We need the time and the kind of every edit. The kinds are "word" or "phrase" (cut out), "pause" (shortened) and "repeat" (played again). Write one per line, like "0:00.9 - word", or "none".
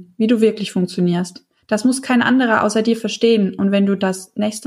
0:01.6 - pause